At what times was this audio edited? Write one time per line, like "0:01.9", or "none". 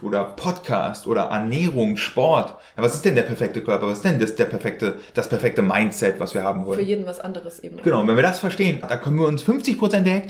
0:08.8